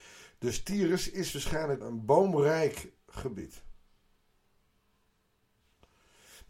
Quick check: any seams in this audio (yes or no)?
yes